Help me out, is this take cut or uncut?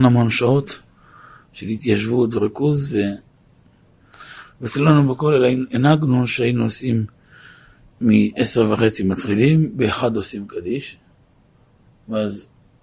uncut